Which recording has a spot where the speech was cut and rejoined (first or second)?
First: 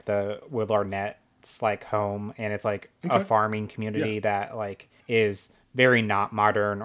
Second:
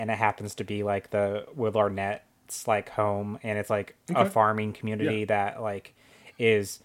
first